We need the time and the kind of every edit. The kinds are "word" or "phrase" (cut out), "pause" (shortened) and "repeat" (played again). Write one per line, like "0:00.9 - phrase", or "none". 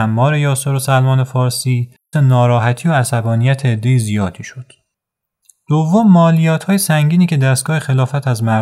0:02.1 - word